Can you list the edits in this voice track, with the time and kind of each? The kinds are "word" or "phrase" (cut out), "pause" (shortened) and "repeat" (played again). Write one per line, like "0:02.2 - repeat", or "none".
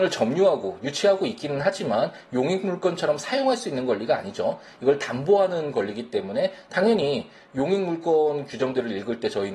none